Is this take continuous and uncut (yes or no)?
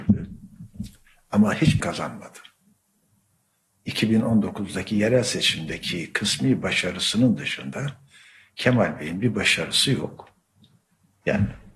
no